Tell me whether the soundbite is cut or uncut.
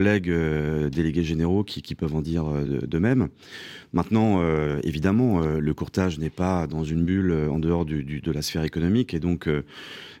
uncut